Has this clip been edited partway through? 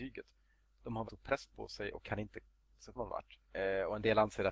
yes; 3 cuts; at 1.1 s, 3.0 s, 3.5 s

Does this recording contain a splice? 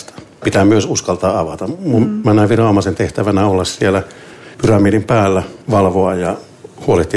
yes; 2 cuts; at 4.5 s, 5.6 s

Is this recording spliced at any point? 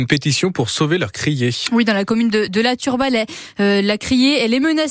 no; 0 cuts

